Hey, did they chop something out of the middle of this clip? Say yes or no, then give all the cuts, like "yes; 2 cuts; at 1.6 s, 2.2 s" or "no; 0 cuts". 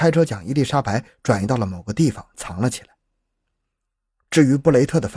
no; 0 cuts